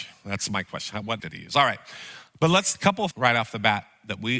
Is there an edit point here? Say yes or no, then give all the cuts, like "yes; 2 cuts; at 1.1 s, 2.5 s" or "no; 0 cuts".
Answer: yes; 3 cuts; at 1.2 s, 2.7 s, 3.1 s